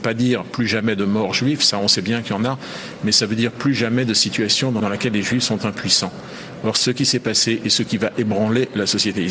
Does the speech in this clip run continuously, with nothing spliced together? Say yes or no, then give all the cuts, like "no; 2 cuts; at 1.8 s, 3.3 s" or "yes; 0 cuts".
yes; 0 cuts